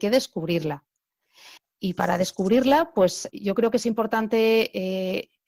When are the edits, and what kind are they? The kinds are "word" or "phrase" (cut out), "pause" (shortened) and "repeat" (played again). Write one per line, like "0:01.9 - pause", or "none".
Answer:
0:01.6 - pause
0:03.3 - word